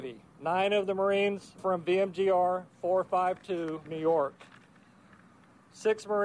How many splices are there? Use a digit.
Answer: 2